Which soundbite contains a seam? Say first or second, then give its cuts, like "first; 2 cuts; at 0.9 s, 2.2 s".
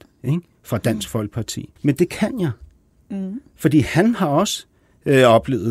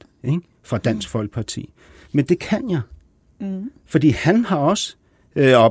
first; 1 cut; at 1.8 s